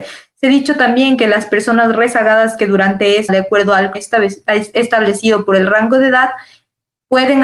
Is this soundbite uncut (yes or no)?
no